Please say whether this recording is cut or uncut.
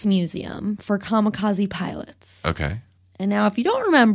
uncut